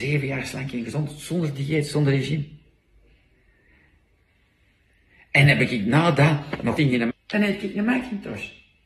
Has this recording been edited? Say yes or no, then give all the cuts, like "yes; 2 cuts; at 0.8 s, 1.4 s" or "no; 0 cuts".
yes; 2 cuts; at 6.8 s, 7.1 s